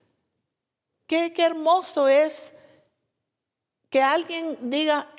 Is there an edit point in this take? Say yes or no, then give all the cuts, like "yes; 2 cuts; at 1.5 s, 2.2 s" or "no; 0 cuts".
no; 0 cuts